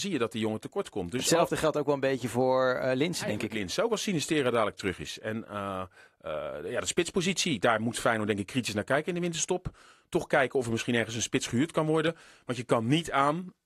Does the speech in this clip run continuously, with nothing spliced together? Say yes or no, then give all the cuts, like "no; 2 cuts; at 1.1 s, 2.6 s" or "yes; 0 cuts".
yes; 0 cuts